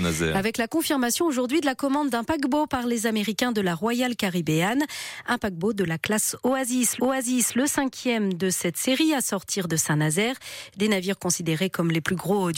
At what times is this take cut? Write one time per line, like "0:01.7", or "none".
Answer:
0:07.0